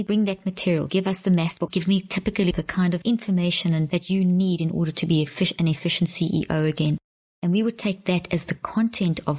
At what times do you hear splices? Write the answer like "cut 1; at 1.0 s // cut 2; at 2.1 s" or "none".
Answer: cut 1; at 2.5 s